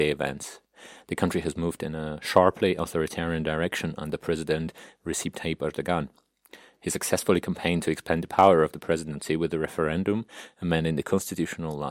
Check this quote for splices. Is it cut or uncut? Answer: uncut